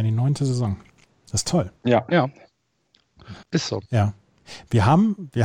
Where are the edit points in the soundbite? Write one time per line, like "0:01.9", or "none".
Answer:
0:01.1
0:01.8
0:03.4
0:03.9